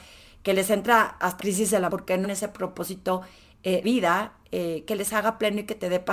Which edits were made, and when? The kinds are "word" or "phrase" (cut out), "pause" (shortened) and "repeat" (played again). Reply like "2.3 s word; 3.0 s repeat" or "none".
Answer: 1.4 s word; 1.9 s phrase; 2.2 s word; 3.8 s word